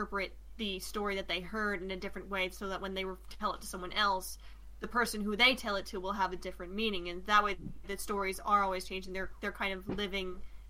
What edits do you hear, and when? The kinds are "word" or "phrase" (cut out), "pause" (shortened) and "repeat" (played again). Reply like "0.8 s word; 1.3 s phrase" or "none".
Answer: none